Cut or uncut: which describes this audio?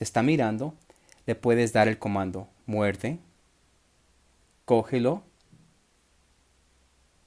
uncut